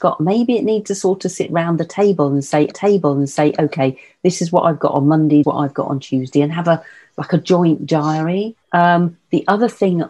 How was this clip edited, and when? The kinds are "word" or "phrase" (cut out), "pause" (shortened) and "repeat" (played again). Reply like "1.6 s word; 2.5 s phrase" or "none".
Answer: 2.7 s repeat; 5.4 s phrase; 8.6 s pause